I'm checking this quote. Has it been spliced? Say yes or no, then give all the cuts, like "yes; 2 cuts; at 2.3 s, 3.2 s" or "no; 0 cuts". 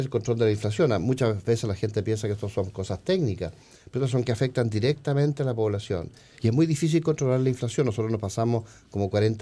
yes; 1 cut; at 4.2 s